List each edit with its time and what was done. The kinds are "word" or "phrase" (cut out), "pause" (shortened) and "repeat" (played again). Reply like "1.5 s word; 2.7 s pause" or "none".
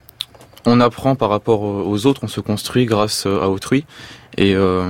none